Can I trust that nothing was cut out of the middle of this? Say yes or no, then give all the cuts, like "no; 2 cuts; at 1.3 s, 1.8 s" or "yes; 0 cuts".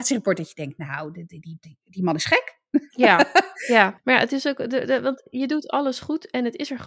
no; 1 cut; at 2.9 s